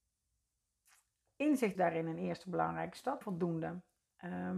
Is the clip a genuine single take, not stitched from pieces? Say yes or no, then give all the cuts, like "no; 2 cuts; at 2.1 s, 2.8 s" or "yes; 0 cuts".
no; 2 cuts; at 1.7 s, 3.2 s